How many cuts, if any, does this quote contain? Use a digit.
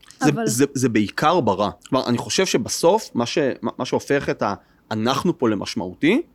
1